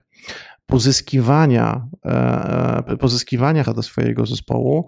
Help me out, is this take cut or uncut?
cut